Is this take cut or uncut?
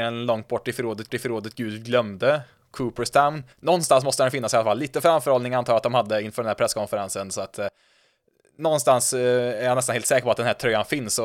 cut